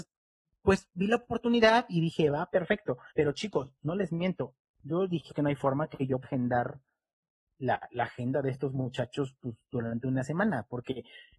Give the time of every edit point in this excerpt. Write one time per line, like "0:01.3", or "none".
0:03.1
0:05.3
0:06.2